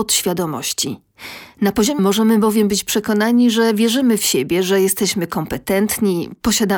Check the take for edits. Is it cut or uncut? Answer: cut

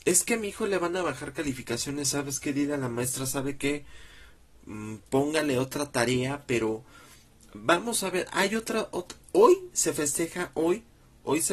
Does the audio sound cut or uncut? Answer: uncut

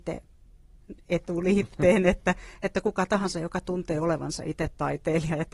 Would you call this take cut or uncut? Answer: uncut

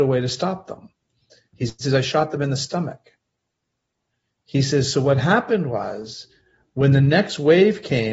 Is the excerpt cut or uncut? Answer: uncut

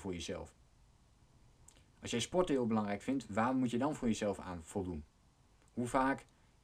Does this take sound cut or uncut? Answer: uncut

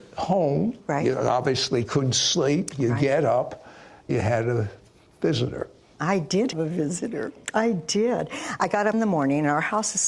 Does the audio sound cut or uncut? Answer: cut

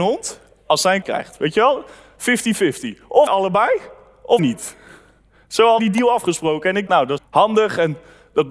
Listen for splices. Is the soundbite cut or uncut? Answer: cut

